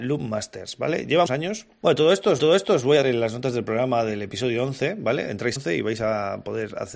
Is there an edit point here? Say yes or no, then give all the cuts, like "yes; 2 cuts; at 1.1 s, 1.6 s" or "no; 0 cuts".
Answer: yes; 4 cuts; at 1.3 s, 2.4 s, 3.0 s, 5.6 s